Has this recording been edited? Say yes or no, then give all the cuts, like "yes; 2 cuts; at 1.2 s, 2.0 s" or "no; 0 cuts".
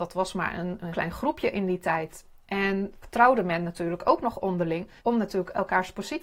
yes; 3 cuts; at 0.9 s, 3.0 s, 5.0 s